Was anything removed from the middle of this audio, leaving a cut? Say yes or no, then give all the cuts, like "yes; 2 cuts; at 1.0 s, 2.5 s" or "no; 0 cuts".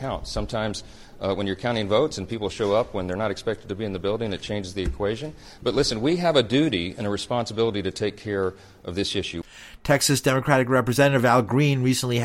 no; 0 cuts